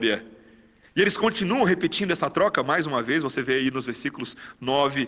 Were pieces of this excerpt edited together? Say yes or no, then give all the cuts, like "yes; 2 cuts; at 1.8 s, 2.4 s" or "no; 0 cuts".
no; 0 cuts